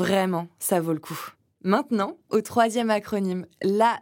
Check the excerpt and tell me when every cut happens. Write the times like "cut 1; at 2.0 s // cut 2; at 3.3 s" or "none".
cut 1; at 2.3 s